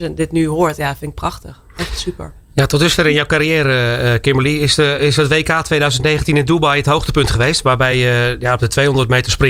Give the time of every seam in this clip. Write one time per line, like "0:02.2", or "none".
none